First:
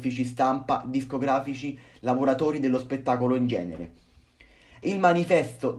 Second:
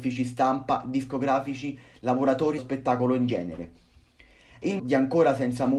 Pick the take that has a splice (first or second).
second